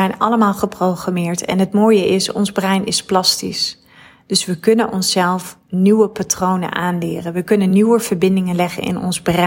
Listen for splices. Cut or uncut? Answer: uncut